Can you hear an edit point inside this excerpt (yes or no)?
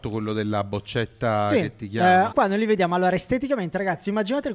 yes